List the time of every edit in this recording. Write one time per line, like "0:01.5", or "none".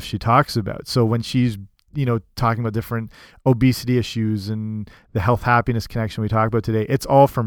none